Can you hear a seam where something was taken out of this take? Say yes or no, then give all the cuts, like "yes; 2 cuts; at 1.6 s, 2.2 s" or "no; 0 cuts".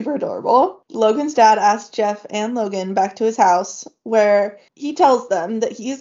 yes; 1 cut; at 4.7 s